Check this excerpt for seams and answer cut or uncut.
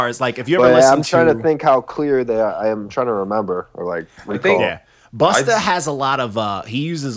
uncut